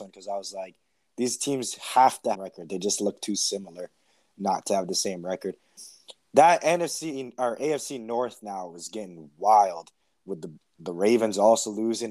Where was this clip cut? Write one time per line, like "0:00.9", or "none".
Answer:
0:02.3